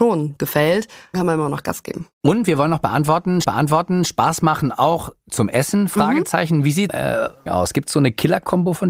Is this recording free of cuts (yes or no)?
no